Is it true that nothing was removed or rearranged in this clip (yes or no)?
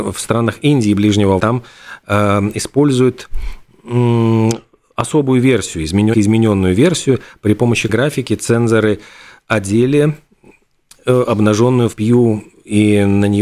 no